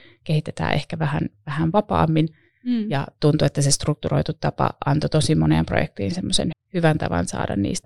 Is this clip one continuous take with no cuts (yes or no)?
no